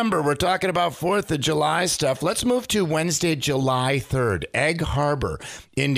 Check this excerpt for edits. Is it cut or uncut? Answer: uncut